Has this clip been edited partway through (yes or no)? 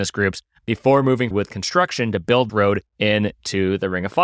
yes